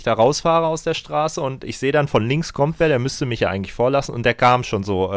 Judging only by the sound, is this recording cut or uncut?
uncut